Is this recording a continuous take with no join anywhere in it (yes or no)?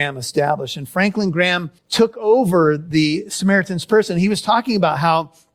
no